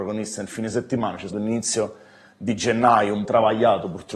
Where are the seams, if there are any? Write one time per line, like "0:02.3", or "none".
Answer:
0:01.3
0:03.3

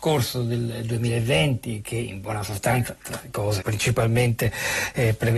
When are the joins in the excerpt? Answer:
0:03.6

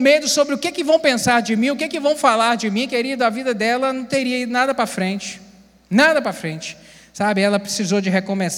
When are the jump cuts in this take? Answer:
none

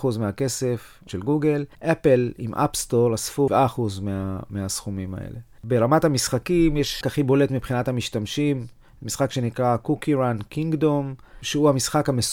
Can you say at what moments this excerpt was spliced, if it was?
0:01.1
0:01.7
0:03.5
0:05.6
0:07.0

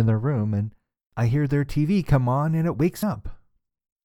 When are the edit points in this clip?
0:03.0

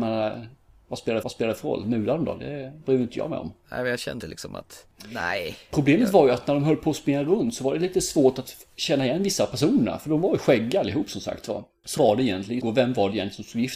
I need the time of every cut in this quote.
0:01.2
0:04.2
0:12.0
0:12.6

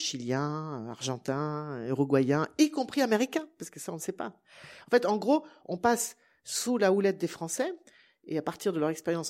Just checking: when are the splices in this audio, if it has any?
none

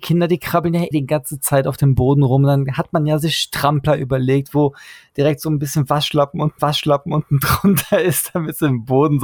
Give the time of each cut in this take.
0:00.9
0:06.6

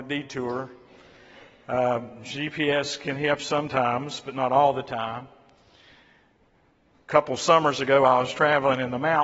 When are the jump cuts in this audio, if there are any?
0:03.4
0:06.9

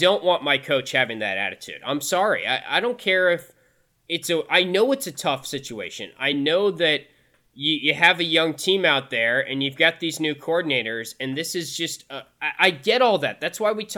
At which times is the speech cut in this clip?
none

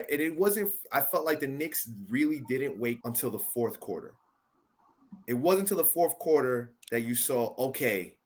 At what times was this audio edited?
0:03.0
0:06.8

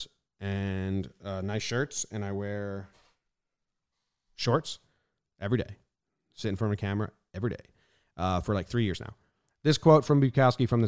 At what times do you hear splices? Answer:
none

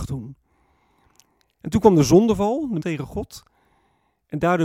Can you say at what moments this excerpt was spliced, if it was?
0:02.8

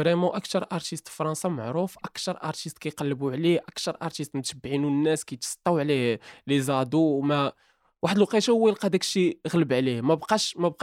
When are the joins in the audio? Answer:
none

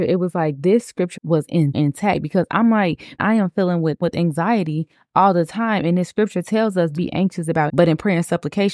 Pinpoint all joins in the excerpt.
0:01.2
0:01.7
0:03.2
0:04.0
0:07.0
0:07.7

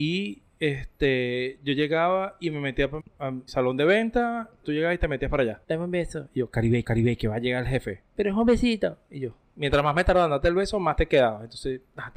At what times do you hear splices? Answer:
0:03.0
0:03.5
0:04.6
0:05.6
0:06.8
0:08.1

